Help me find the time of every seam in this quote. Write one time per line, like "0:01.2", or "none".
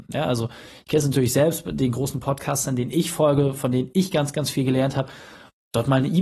none